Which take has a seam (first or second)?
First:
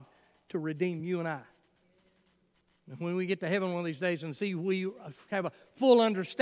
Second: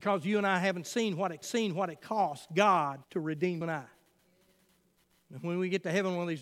second